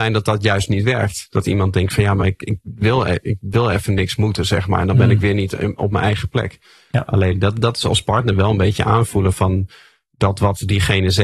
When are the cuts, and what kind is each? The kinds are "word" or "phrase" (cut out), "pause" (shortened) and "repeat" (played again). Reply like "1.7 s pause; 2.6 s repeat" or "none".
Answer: none